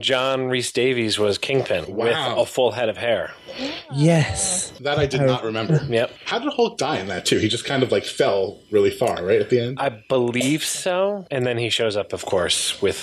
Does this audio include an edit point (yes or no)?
no